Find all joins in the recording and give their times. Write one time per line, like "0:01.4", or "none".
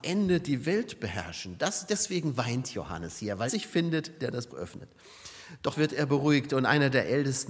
0:03.5
0:04.5
0:05.7